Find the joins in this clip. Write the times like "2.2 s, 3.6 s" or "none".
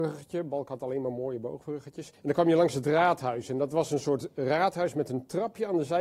2.1 s